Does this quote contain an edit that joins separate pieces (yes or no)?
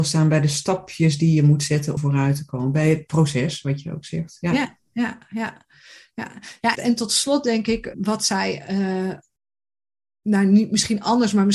yes